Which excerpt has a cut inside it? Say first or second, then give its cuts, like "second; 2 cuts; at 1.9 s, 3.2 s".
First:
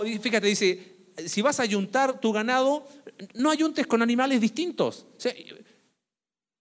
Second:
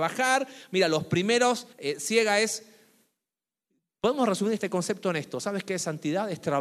second; 1 cut; at 1.7 s